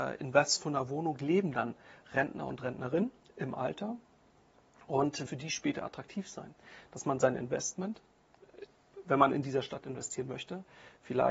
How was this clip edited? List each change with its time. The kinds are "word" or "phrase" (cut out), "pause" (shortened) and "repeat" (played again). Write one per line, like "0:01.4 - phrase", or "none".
0:05.3 - phrase